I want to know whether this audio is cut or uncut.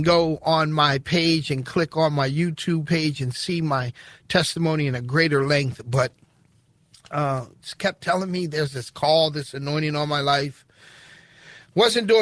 uncut